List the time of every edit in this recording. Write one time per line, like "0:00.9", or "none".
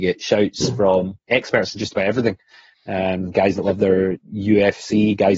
none